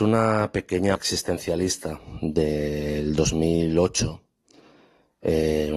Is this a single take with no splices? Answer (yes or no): no